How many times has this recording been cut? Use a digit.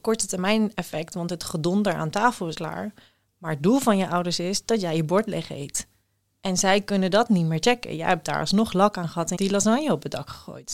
2